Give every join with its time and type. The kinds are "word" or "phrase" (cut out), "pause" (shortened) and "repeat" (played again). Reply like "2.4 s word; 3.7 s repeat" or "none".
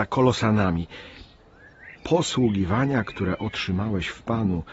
2.0 s word